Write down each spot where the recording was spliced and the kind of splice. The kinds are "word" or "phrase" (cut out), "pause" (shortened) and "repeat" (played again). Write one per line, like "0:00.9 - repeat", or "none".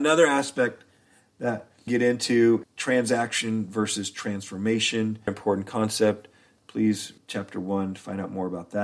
0:01.9 - word
0:02.6 - word
0:05.3 - word
0:07.2 - word

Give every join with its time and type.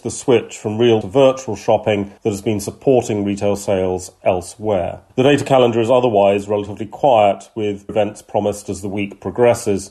0:01.0 - word
0:02.2 - pause
0:05.1 - pause
0:07.9 - word

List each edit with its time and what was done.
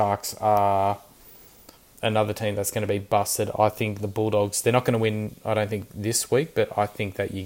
0:04.0 - word

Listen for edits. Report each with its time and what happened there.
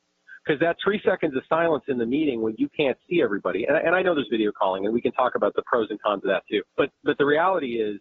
0:06.7 - pause

